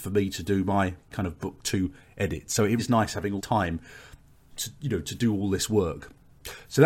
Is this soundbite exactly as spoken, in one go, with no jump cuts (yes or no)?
no